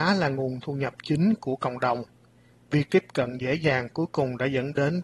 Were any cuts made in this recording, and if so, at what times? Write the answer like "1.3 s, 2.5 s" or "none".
none